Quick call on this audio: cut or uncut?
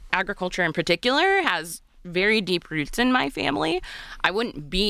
uncut